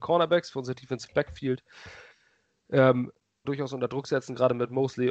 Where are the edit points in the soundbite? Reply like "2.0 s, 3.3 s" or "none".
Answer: 3.4 s